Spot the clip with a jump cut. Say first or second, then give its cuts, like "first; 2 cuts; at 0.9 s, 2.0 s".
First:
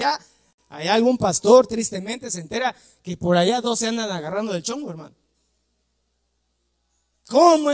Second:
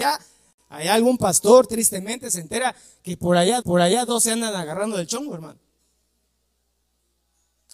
second; 1 cut; at 3.6 s